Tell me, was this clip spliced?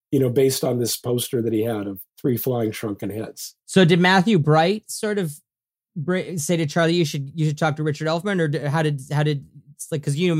yes; 1 cut; at 2.1 s

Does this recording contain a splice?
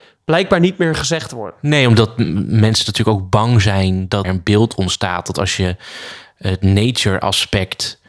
yes; 1 cut; at 4.2 s

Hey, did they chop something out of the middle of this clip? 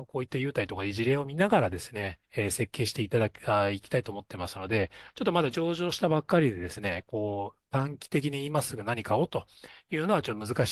yes; 1 cut; at 2.2 s

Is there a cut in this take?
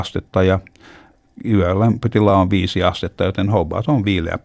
no; 0 cuts

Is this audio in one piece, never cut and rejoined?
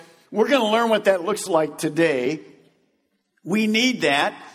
yes; 0 cuts

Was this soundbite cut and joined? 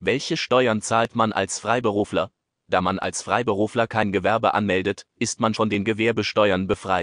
yes; 1 cut; at 5.5 s

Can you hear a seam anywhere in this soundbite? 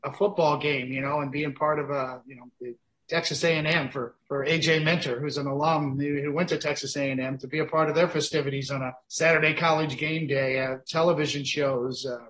yes; 2 cuts; at 4.2 s, 9.0 s

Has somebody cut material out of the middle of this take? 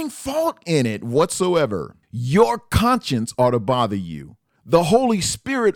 yes; 1 cut; at 4.6 s

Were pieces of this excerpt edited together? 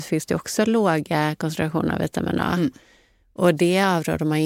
no; 0 cuts

